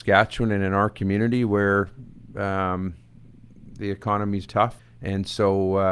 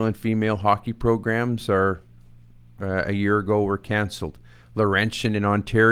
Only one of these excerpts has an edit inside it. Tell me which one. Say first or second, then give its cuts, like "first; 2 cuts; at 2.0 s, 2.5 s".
first; 2 cuts; at 4.5 s, 4.8 s